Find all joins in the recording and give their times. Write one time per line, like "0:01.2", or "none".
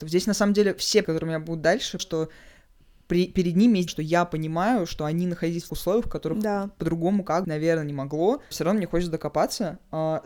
0:01.0
0:02.0
0:03.9
0:05.7
0:07.4
0:08.5